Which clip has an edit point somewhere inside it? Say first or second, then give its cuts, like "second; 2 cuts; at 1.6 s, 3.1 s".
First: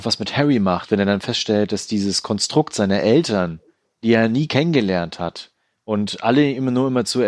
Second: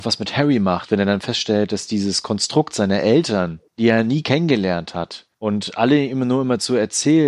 second; 2 cuts; at 3.7 s, 5.3 s